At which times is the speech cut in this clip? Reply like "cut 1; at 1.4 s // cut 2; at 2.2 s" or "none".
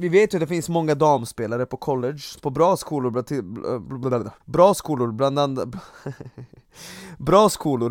cut 1; at 2.4 s // cut 2; at 4.4 s